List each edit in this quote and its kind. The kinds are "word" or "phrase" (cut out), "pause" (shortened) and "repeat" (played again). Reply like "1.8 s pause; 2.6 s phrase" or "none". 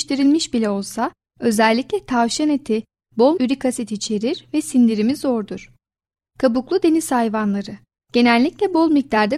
3.4 s word